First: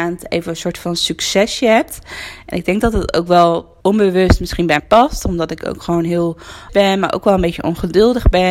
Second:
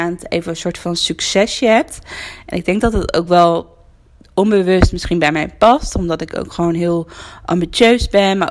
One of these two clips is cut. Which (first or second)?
first